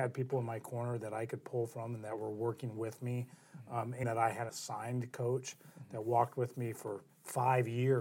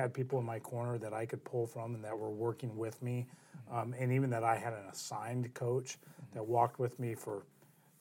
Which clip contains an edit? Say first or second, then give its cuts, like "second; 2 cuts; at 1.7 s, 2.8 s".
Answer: first; 3 cuts; at 4.0 s, 4.5 s, 7.1 s